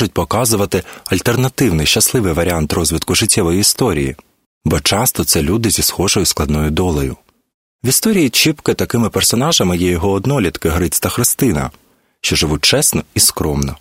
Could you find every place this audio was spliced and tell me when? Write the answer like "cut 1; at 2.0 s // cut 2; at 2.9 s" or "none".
none